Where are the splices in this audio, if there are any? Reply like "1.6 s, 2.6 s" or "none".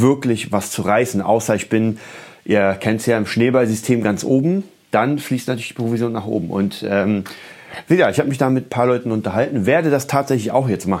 none

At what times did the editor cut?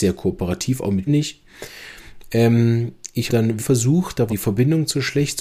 1.1 s, 3.3 s, 3.6 s, 4.3 s

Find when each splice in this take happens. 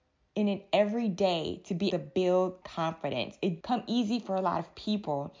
1.9 s, 2.6 s, 3.6 s

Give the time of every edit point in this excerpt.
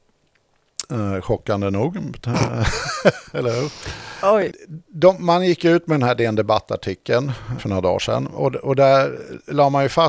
7.6 s

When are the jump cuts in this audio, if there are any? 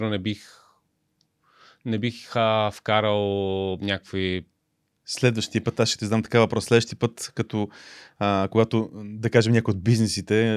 none

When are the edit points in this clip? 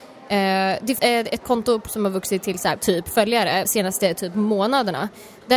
1.0 s, 1.4 s, 1.9 s, 2.8 s, 3.6 s

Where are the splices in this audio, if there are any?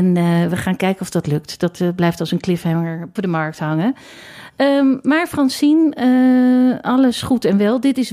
3.2 s

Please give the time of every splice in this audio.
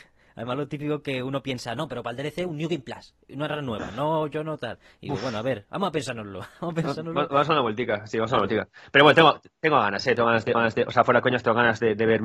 10.5 s

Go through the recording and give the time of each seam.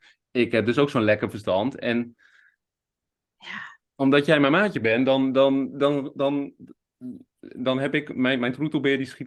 none

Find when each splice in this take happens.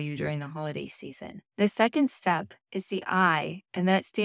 1.5 s, 2.6 s

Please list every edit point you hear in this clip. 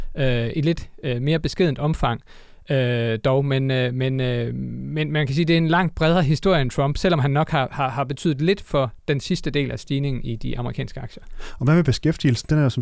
none

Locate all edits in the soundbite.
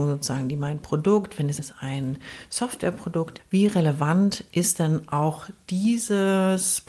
1.6 s, 3.4 s

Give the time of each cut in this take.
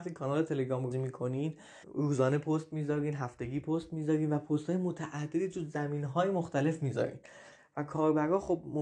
0.9 s, 1.8 s

